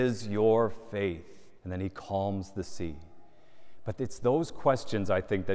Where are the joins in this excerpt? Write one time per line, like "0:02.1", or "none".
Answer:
0:01.6